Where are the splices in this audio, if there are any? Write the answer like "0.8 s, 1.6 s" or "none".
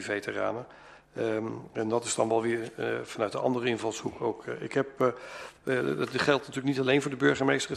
none